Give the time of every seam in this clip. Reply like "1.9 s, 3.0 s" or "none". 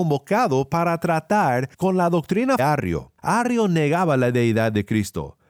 1.7 s, 2.6 s, 3.2 s